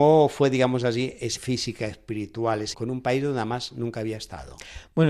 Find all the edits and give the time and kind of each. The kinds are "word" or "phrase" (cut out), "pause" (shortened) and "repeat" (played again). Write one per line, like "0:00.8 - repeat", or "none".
0:01.4 - word
0:02.7 - word